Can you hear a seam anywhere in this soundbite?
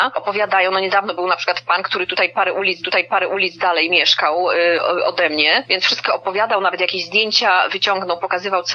yes; 1 cut; at 2.8 s

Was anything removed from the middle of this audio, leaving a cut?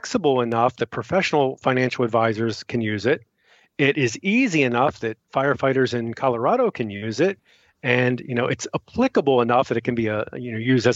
no; 0 cuts

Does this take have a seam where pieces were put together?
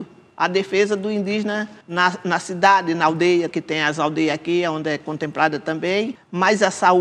yes; 2 cuts; at 1.8 s, 3.5 s

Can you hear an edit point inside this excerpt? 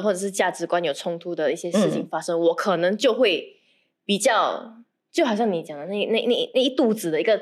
no; 0 cuts

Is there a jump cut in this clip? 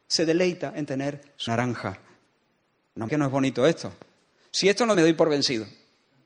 yes; 3 cuts; at 1.5 s, 3.1 s, 4.9 s

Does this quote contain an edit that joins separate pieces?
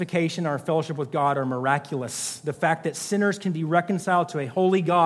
no; 0 cuts

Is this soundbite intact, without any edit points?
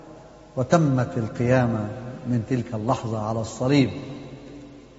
yes; 0 cuts

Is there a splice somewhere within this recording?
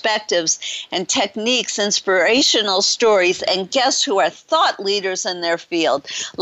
no; 0 cuts

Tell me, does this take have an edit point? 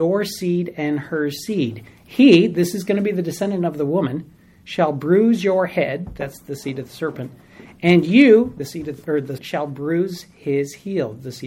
yes; 1 cut; at 9.4 s

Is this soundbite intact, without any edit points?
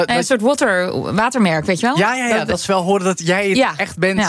yes; 0 cuts

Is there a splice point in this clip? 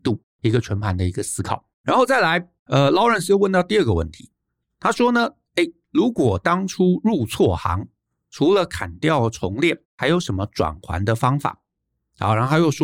yes; 3 cuts; at 1.7 s, 2.6 s, 9.8 s

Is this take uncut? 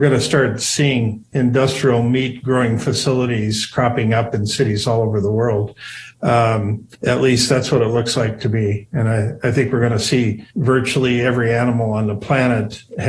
no; 2 cuts; at 6.9 s, 10.5 s

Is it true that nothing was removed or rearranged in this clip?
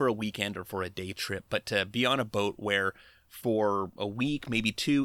yes; 0 cuts

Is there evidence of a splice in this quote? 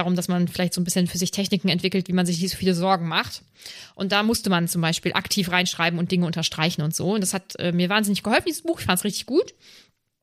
no; 0 cuts

